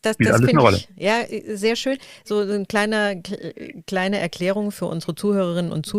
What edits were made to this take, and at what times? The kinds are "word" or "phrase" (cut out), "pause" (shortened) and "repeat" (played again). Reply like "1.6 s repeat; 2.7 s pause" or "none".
none